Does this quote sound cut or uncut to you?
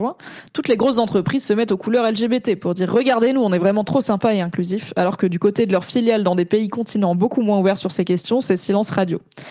uncut